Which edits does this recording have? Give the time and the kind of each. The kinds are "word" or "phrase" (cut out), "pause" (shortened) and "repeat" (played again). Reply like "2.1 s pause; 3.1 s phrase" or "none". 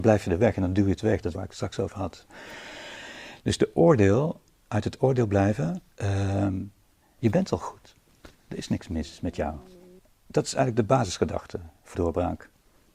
1.3 s word; 5.9 s pause; 10.0 s pause; 11.9 s word